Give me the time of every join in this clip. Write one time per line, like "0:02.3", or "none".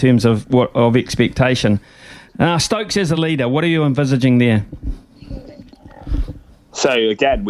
none